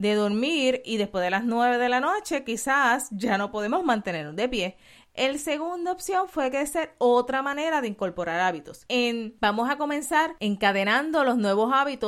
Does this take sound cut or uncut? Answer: uncut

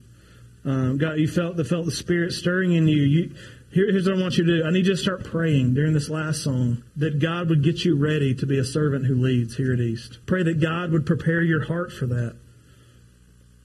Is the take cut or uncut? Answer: cut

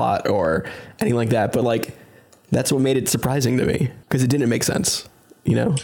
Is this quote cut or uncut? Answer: cut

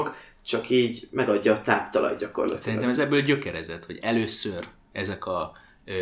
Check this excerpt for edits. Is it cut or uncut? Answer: uncut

